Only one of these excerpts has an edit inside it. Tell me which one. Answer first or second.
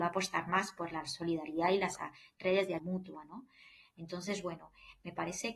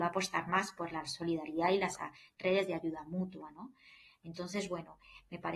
first